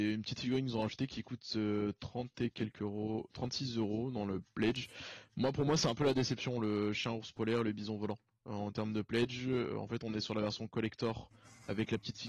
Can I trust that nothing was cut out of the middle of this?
yes; 0 cuts

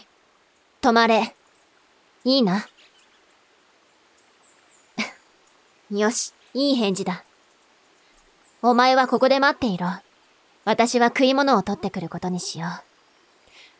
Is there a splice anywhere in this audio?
yes; 1 cut; at 6.4 s

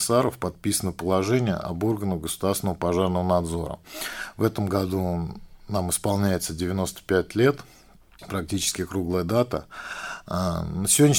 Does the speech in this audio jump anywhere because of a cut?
no; 0 cuts

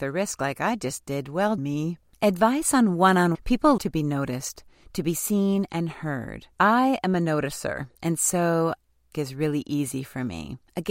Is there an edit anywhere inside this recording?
yes; 6 cuts; at 1.6 s, 3.3 s, 3.8 s, 6.5 s, 7.9 s, 9.1 s

